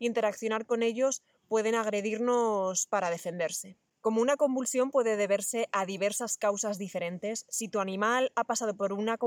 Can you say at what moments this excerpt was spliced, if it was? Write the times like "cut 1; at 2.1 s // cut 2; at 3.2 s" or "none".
none